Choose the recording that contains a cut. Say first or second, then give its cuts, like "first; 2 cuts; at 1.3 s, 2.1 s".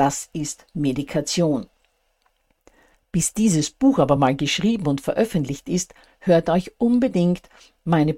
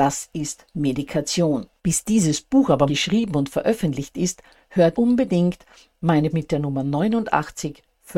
second; 4 cuts; at 1.8 s, 2.9 s, 4.9 s, 6.3 s